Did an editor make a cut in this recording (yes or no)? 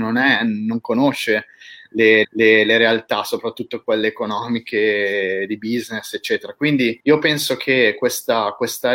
yes